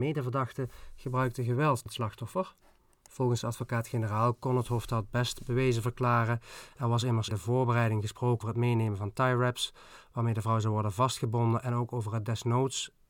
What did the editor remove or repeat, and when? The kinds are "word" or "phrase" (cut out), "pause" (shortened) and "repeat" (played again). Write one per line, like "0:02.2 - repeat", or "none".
0:01.9 - word
0:07.3 - word
0:08.4 - word

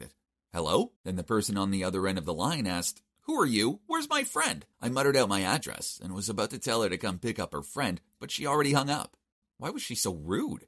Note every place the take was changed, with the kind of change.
0:01.0 - pause
0:04.7 - pause

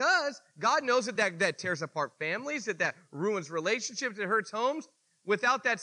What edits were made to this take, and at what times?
none

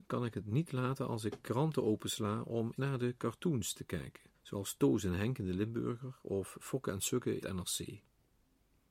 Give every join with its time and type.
0:02.8 - word
0:04.3 - pause
0:07.4 - word

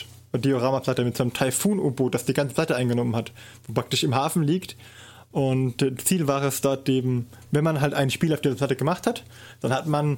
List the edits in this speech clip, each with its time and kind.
0:07.4 - pause

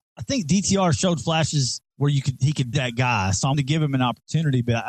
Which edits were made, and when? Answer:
0:01.9 - pause
0:02.7 - word
0:03.5 - word

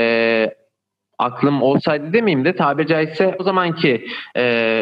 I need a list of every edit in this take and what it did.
0:03.4 - word

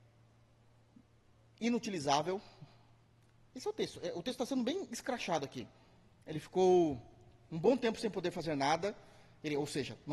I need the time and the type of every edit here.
none

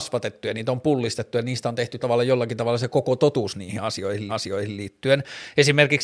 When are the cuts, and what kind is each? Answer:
0:02.0 - word
0:04.3 - repeat

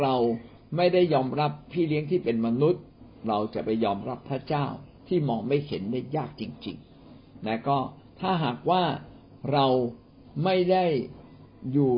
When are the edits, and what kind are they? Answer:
0:05.0 - pause
0:06.9 - pause
0:08.1 - pause

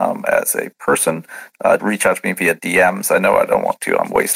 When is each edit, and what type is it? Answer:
0:01.8 - word

